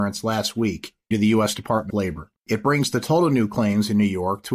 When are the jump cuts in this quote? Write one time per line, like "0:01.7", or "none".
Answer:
0:01.1
0:01.9
0:02.4